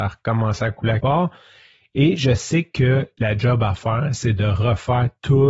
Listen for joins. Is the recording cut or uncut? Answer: cut